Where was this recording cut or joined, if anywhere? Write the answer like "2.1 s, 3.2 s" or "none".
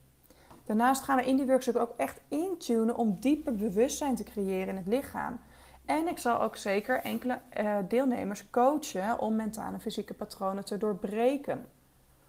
none